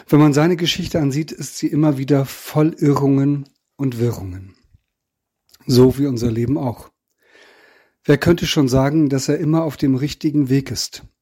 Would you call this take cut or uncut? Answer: uncut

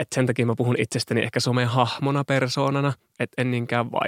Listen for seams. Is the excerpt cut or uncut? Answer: uncut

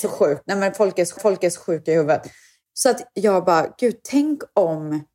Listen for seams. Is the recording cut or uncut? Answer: cut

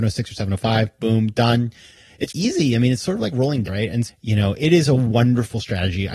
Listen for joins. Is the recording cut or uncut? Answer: cut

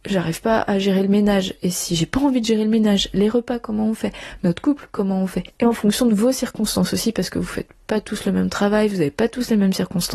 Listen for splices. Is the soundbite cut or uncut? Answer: uncut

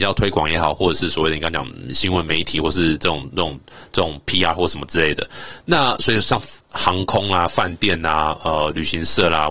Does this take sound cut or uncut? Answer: uncut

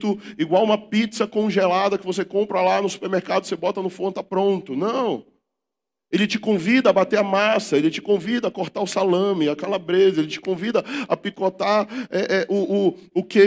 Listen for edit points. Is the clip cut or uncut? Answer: uncut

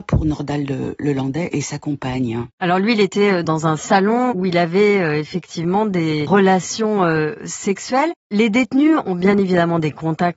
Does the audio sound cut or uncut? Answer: cut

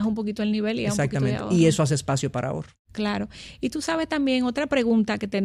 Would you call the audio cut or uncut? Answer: uncut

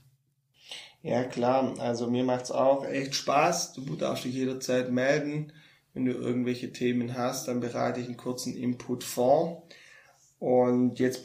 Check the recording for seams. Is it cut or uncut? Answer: uncut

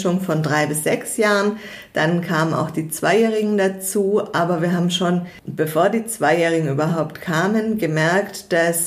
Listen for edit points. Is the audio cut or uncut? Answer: uncut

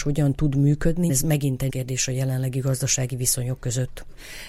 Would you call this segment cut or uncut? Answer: cut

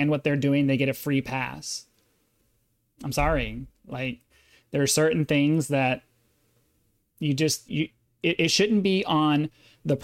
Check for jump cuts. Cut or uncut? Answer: cut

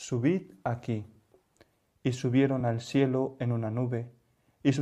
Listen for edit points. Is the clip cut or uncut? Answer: uncut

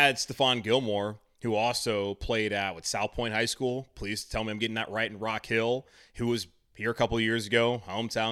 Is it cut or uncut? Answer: uncut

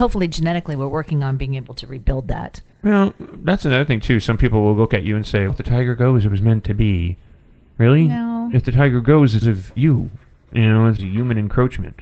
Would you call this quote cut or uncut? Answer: cut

